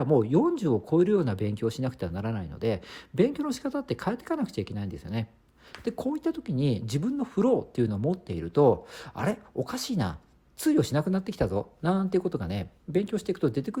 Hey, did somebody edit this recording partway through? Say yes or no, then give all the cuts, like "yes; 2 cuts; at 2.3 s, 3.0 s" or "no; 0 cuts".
no; 0 cuts